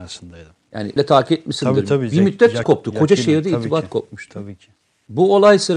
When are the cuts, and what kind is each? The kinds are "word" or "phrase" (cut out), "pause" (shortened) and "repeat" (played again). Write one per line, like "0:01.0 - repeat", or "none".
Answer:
0:01.0 - word
0:02.6 - phrase
0:04.8 - pause